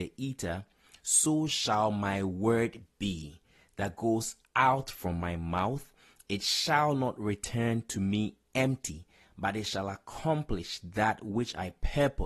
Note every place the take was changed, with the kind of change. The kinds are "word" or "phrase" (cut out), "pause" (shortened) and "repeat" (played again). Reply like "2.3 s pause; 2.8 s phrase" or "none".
none